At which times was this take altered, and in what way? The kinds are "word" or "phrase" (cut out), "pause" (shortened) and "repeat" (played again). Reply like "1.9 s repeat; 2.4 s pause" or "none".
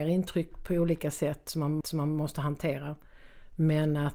1.8 s repeat